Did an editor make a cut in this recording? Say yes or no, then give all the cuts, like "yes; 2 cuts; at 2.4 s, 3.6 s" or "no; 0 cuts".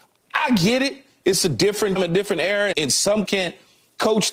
yes; 3 cuts; at 2.0 s, 2.7 s, 3.3 s